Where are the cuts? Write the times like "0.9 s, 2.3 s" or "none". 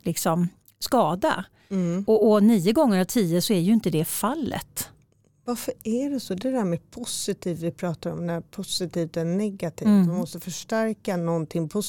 none